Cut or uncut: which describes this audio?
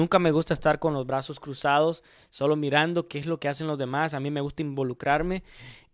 uncut